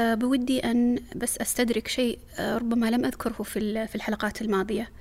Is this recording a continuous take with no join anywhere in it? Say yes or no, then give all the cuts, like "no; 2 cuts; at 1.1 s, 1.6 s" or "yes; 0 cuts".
yes; 0 cuts